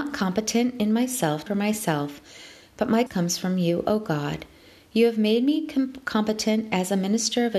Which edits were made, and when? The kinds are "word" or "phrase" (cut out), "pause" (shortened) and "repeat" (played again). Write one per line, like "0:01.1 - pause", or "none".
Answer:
0:01.5 - phrase
0:03.1 - word